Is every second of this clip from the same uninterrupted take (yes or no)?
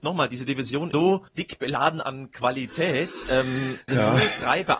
no